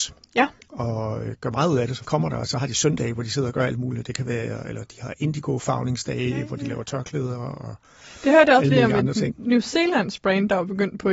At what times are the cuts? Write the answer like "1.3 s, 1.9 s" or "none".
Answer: 2.0 s